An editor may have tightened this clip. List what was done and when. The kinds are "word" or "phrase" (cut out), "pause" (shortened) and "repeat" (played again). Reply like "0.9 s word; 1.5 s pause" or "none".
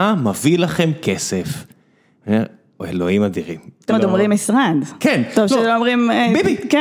2.7 s pause; 3.9 s word